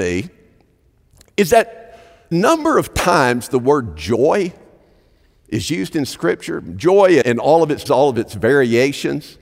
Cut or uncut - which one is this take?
cut